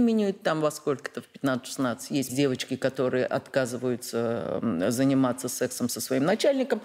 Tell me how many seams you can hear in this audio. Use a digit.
1